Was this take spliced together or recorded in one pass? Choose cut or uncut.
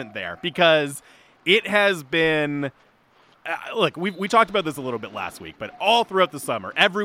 uncut